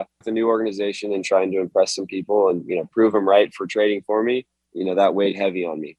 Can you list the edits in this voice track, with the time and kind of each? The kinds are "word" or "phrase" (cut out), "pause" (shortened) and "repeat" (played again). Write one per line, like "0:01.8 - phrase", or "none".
none